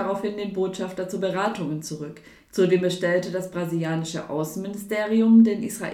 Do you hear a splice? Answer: no; 0 cuts

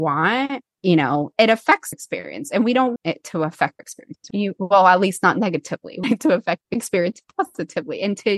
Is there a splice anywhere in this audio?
yes; 7 cuts; at 1.3 s, 1.9 s, 3.0 s, 3.8 s, 4.3 s, 6.0 s, 6.6 s

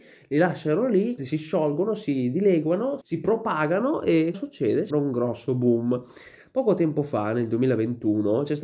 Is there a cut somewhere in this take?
yes; 4 cuts; at 1.2 s, 3.0 s, 4.3 s, 4.9 s

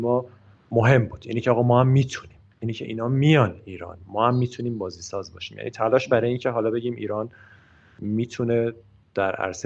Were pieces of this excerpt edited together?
no; 0 cuts

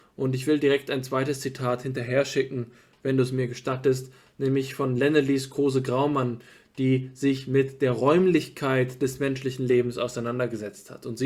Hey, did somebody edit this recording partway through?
no; 0 cuts

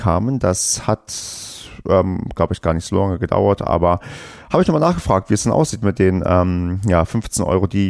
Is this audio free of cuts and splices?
yes; 0 cuts

